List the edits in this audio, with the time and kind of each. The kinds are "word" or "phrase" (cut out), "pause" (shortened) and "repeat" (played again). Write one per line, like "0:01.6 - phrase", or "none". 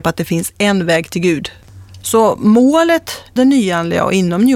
0:03.4 - word

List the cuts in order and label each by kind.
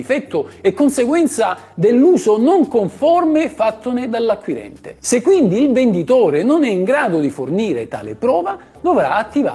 none

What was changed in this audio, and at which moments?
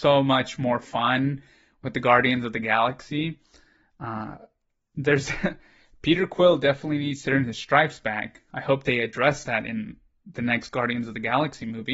none

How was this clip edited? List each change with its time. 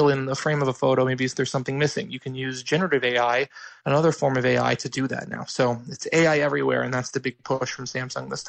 none

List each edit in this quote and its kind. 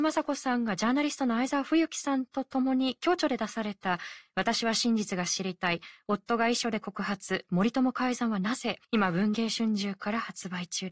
0:08.8 - pause

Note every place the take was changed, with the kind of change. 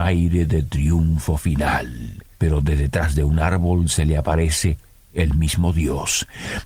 0:02.3 - pause

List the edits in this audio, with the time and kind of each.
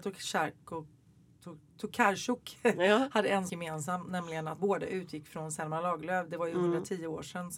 0:03.5 - word
0:04.6 - word

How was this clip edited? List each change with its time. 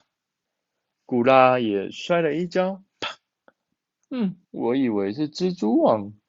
0:02.9 - pause
0:04.4 - pause

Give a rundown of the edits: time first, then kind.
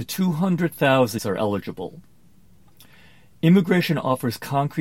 0:01.2 - word

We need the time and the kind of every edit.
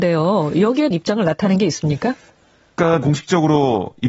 0:00.9 - phrase
0:03.0 - word

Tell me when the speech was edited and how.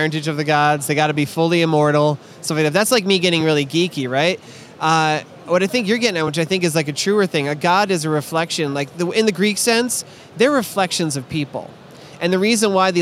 none

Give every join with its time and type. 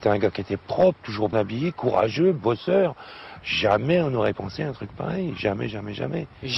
0:01.3 - word
0:04.3 - word

